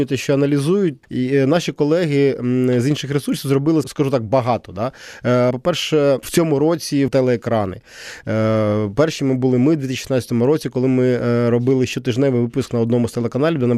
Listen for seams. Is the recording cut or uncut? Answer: cut